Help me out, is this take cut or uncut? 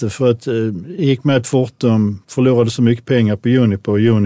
uncut